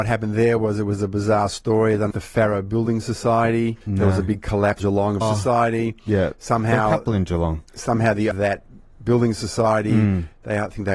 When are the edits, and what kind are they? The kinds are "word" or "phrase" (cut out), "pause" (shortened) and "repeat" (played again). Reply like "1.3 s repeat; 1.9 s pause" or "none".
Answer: 2.1 s phrase; 3.8 s pause; 4.8 s word; 5.2 s phrase; 7.7 s pause; 8.3 s phrase